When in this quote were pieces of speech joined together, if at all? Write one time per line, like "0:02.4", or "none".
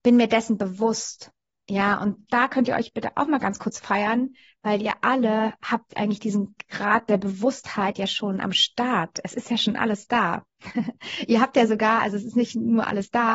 none